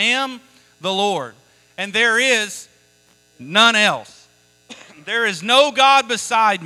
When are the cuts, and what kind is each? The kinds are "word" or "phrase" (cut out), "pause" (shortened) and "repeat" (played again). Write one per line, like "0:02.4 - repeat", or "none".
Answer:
none